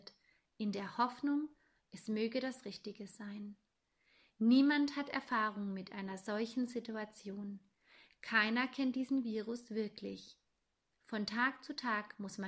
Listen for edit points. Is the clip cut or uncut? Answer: uncut